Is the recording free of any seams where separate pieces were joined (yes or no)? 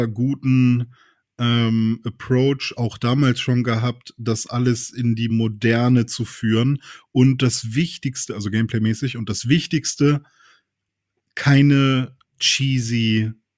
yes